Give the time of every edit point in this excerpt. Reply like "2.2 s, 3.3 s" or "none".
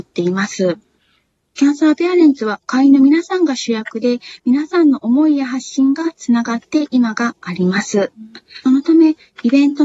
8.6 s